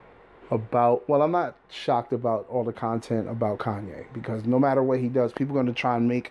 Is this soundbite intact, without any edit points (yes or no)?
yes